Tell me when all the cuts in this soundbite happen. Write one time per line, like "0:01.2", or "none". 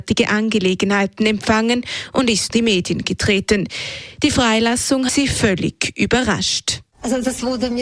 0:02.5
0:05.1

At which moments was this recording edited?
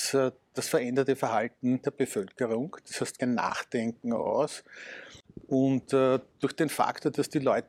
0:01.8
0:03.2
0:06.3

